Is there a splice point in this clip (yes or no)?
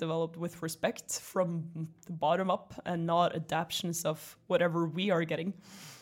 no